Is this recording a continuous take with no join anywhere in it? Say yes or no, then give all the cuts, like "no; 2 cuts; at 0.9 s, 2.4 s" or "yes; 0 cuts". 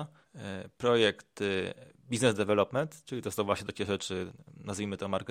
yes; 0 cuts